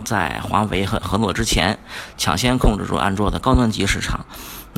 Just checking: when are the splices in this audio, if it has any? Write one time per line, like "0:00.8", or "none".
0:01.0